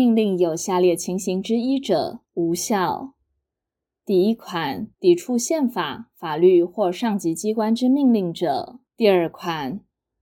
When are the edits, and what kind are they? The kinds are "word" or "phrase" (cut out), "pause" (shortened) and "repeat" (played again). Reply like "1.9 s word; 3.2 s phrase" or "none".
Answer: 2.3 s pause; 4.9 s pause; 8.9 s pause